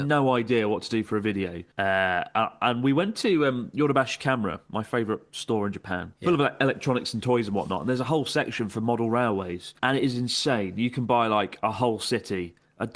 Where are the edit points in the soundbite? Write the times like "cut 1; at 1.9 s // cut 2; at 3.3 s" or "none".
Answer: cut 1; at 1.7 s // cut 2; at 6.2 s // cut 3; at 9.8 s